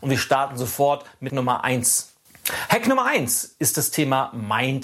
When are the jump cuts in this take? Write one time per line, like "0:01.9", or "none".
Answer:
0:01.3